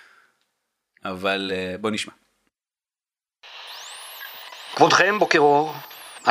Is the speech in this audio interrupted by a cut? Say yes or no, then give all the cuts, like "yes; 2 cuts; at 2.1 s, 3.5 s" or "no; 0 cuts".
no; 0 cuts